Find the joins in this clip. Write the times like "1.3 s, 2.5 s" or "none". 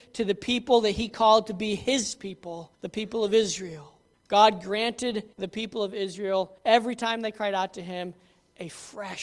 2.7 s, 4.1 s, 5.3 s, 6.6 s